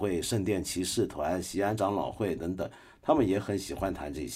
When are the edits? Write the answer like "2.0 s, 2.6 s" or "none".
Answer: none